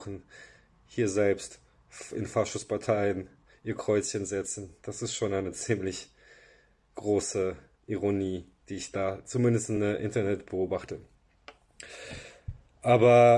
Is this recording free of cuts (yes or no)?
yes